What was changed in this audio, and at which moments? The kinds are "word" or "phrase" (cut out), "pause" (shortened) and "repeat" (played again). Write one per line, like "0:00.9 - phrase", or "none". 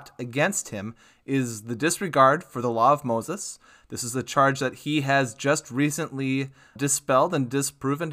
0:06.8 - word